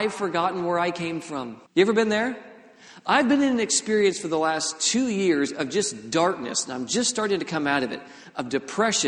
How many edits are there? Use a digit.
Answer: 1